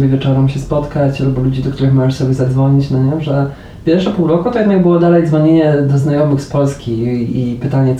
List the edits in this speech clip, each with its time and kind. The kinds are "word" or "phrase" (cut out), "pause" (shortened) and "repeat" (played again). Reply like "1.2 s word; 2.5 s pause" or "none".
none